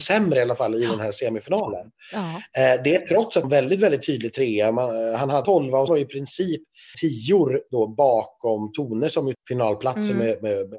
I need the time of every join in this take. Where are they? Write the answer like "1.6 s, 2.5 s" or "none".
3.4 s, 5.4 s, 5.9 s, 6.9 s, 9.3 s